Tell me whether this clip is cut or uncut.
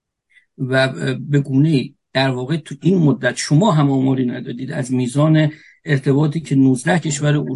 uncut